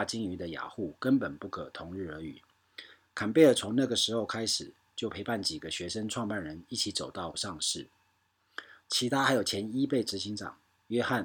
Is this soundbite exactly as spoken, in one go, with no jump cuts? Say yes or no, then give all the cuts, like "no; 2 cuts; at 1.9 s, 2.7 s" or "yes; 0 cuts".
no; 1 cut; at 7.3 s